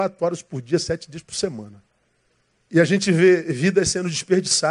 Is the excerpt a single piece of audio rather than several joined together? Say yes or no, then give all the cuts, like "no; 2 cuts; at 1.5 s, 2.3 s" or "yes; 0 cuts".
no; 1 cut; at 2.0 s